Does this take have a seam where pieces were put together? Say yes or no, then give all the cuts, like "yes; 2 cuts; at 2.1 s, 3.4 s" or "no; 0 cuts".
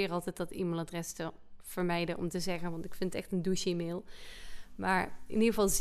no; 0 cuts